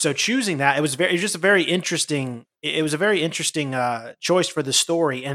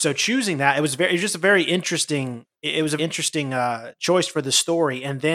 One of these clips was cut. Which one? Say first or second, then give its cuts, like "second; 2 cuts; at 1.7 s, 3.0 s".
second; 1 cut; at 3.0 s